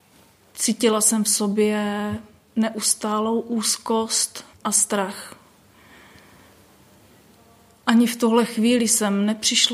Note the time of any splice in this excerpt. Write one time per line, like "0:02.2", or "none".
0:04.5